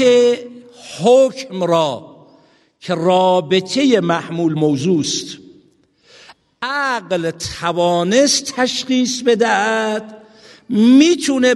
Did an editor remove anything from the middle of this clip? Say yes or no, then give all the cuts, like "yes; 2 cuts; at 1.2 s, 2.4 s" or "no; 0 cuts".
yes; 1 cut; at 4.6 s